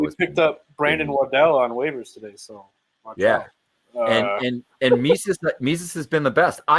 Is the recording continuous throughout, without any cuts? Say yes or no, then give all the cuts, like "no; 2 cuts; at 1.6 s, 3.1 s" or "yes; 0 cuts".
yes; 0 cuts